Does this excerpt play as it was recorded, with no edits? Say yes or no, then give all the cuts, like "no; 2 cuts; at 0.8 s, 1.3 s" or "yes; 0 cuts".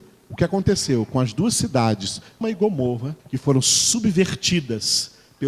no; 2 cuts; at 2.4 s, 3.2 s